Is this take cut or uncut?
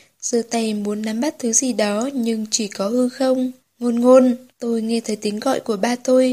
cut